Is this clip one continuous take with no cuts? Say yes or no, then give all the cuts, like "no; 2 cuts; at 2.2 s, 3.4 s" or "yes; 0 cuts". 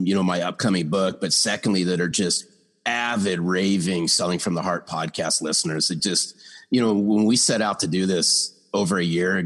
yes; 0 cuts